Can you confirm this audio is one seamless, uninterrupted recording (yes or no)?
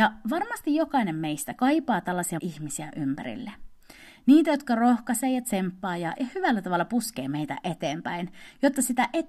no